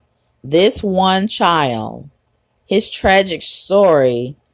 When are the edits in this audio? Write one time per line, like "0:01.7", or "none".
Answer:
none